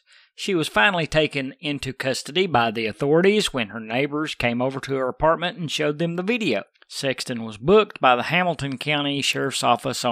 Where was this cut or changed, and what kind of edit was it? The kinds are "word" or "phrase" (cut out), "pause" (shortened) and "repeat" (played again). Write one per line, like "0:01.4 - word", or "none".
none

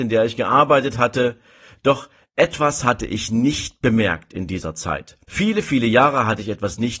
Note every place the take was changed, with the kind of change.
0:05.2 - pause

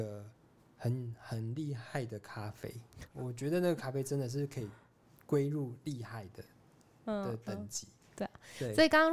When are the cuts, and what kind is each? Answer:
0:03.1 - word

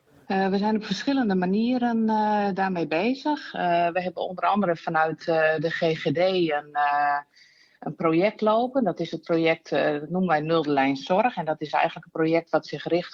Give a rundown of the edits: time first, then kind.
none

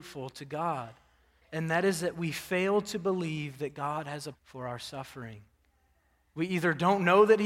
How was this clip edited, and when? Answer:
0:04.3 - word

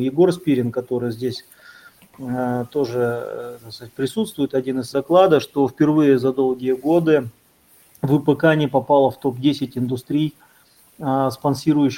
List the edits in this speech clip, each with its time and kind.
0:04.9 - word

